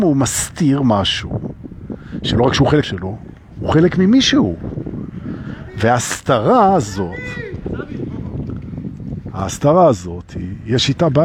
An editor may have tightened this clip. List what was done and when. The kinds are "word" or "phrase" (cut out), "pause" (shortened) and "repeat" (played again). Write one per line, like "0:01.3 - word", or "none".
0:02.8 - word